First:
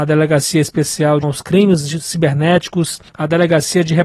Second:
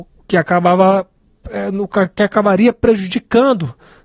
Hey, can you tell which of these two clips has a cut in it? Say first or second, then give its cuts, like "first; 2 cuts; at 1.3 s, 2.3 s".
first; 2 cuts; at 1.2 s, 3.1 s